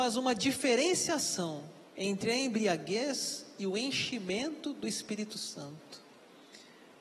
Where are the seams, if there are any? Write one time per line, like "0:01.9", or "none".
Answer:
0:01.9